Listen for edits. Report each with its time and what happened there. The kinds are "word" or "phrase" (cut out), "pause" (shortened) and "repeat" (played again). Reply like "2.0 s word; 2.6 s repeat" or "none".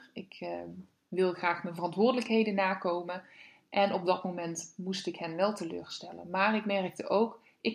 none